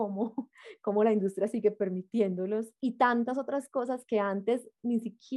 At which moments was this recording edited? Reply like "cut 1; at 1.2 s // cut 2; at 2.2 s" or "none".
cut 1; at 2.8 s